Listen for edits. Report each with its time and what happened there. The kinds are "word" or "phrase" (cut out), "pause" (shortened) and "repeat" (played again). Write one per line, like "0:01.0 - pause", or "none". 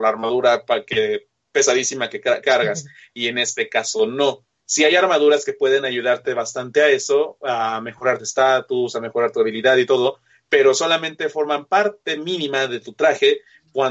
0:02.4 - word
0:08.2 - word